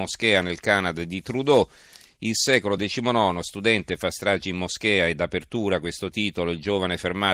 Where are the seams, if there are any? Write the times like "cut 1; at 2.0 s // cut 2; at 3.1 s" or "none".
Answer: none